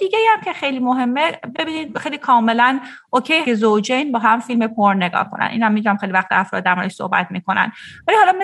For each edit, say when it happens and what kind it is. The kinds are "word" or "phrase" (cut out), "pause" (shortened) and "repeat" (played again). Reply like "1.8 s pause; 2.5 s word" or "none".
1.5 s word; 3.4 s word